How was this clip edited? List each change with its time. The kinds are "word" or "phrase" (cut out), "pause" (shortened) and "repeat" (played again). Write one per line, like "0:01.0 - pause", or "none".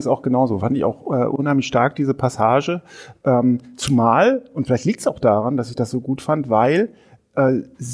none